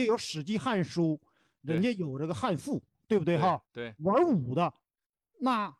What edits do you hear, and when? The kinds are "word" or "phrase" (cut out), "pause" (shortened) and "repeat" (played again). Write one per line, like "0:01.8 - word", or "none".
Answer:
none